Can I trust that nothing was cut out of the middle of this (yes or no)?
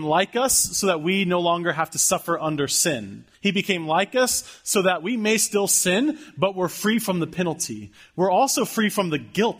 no